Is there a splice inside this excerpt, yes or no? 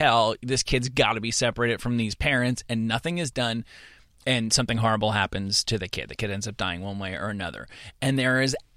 no